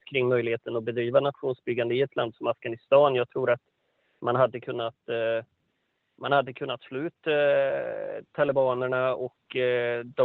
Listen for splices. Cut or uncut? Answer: uncut